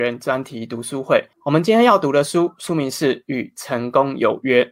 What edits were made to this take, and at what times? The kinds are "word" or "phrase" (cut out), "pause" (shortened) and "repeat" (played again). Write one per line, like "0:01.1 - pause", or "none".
0:01.3 - pause